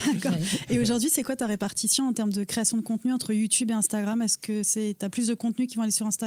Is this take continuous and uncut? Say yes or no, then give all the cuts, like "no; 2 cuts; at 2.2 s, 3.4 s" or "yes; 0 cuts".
yes; 0 cuts